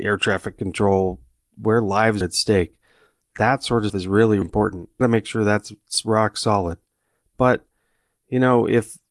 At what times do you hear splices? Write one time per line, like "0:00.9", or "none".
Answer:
0:02.2
0:03.9
0:04.4
0:05.0